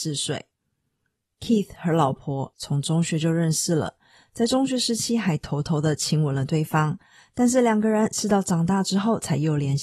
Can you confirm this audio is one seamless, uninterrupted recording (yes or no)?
no